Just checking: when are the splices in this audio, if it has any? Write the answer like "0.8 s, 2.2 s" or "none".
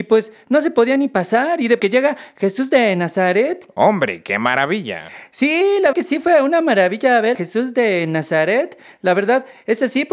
1.8 s, 5.9 s, 7.3 s